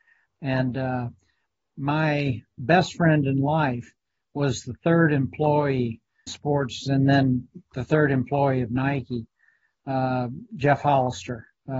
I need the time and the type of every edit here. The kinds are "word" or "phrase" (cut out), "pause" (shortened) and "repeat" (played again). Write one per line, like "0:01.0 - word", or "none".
0:06.3 - phrase